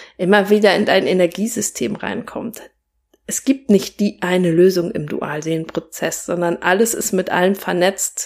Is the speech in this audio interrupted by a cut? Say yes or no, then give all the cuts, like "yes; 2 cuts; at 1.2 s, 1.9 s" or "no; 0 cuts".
no; 0 cuts